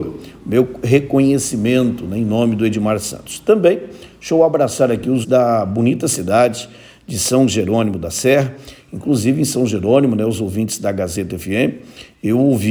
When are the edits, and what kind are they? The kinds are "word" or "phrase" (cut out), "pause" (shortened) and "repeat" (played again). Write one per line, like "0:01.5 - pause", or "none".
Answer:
0:05.2 - word